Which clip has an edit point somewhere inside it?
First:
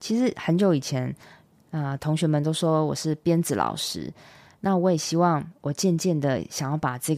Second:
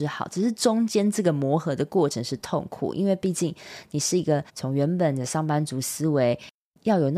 second; 1 cut; at 4.5 s

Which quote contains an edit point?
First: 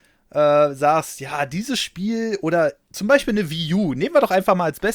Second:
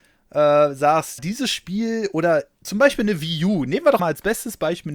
second; 2 cuts; at 1.2 s, 4.0 s

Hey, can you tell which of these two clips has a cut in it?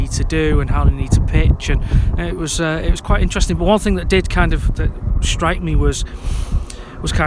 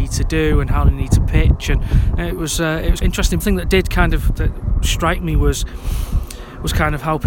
second; 2 cuts; at 3.0 s, 3.4 s

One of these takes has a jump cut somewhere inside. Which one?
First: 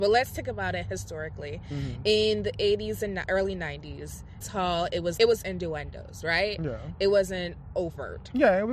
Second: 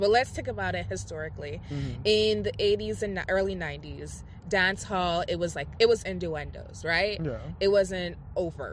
first; 2 cuts; at 4.4 s, 5.2 s

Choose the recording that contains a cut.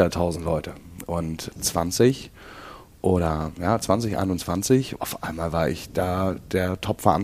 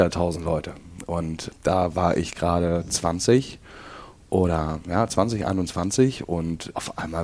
first; 2 cuts; at 1.6 s, 5.0 s

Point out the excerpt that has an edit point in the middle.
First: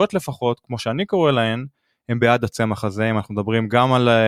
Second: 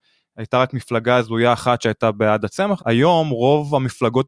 second; 1 cut; at 2.8 s

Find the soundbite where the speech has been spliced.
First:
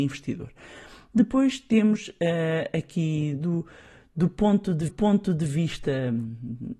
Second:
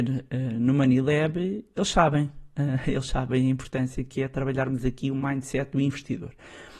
first; 1 cut; at 4.9 s

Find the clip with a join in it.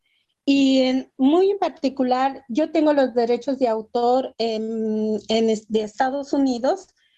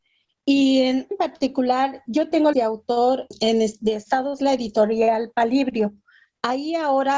second; 4 cuts; at 1.1 s, 2.5 s, 3.3 s, 4.4 s

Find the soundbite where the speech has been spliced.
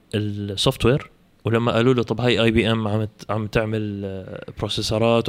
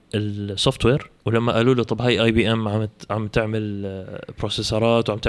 second; 1 cut; at 1.2 s

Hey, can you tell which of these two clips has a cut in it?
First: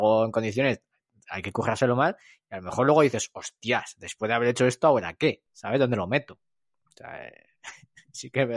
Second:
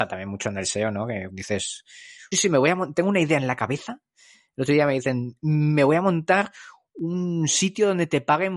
second; 2 cuts; at 1.3 s, 2.3 s

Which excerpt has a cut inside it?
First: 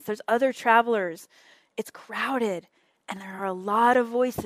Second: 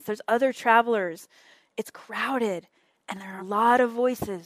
second; 1 cut; at 3.4 s

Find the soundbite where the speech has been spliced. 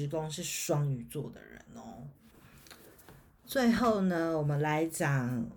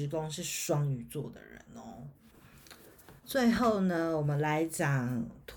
second; 1 cut; at 3.2 s

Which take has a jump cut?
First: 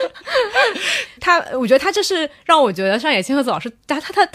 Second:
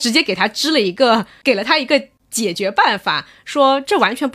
first; 1 cut; at 1.2 s

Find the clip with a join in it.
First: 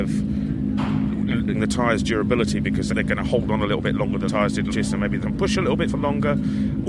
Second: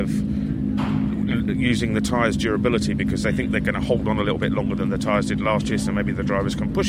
first; 6 cuts; at 1.5 s, 2.9 s, 4.3 s, 4.7 s, 5.2 s, 5.8 s

